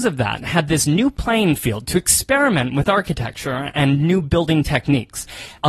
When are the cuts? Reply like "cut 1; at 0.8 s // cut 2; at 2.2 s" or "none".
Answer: none